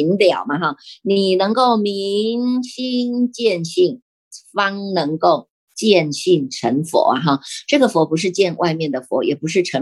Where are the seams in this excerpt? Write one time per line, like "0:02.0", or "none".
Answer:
none